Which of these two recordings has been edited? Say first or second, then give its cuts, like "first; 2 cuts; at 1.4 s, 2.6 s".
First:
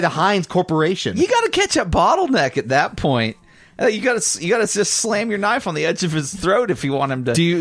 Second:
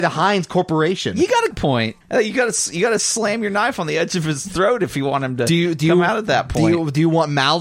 second; 3 cuts; at 1.5 s, 2.0 s, 3.0 s